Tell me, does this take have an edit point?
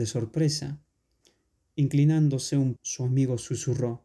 yes; 1 cut; at 2.8 s

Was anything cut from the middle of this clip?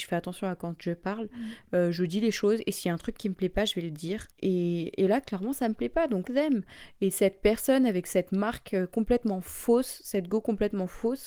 yes; 2 cuts; at 4.3 s, 6.2 s

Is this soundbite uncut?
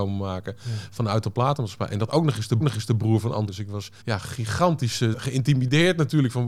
no; 5 cuts; at 2.1 s, 2.6 s, 3.5 s, 4.0 s, 5.1 s

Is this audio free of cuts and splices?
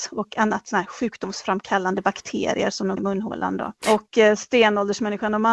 no; 2 cuts; at 3.0 s, 3.8 s

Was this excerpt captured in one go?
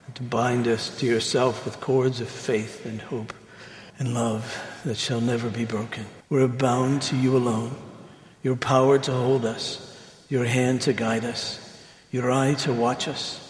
no; 2 cuts; at 3.9 s, 6.2 s

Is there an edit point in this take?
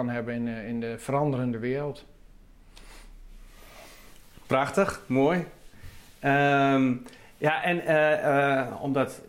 no; 0 cuts

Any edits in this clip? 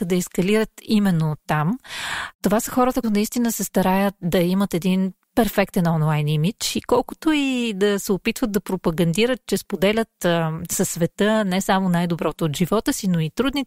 yes; 1 cut; at 3.0 s

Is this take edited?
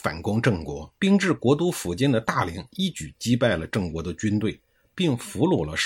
yes; 1 cut; at 1.0 s

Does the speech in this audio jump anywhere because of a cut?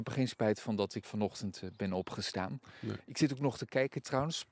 yes; 1 cut; at 1.0 s

